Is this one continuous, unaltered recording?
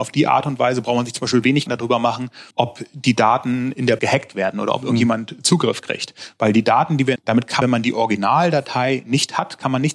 no; 5 cuts; at 1.7 s, 2.5 s, 4.0 s, 7.2 s, 7.6 s

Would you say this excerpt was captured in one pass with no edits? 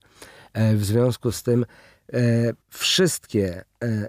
no; 1 cut; at 2.6 s

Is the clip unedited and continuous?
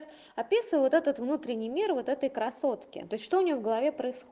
yes; 0 cuts

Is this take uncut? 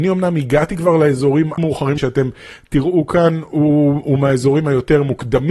no; 2 cuts; at 1.6 s, 2.0 s

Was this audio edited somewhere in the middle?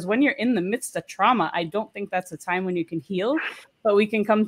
no; 0 cuts

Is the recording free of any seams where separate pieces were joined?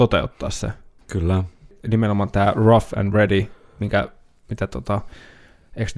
yes; 0 cuts

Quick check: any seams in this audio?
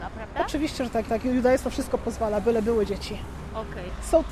yes; 1 cut; at 1.1 s

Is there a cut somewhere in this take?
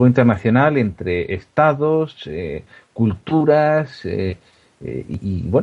no; 0 cuts

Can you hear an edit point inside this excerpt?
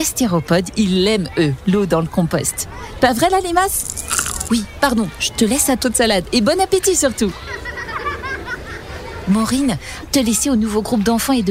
yes; 4 cuts; at 4.5 s, 4.8 s, 5.8 s, 10.0 s

